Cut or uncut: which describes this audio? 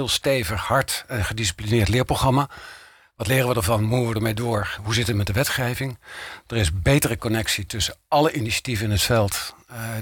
uncut